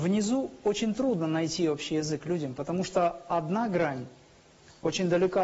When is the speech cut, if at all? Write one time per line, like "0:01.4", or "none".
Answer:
none